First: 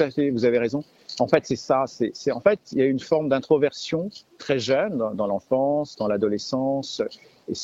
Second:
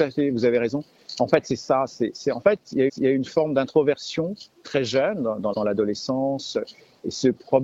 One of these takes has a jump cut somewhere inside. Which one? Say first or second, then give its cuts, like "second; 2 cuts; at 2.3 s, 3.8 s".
second; 2 cuts; at 2.9 s, 5.5 s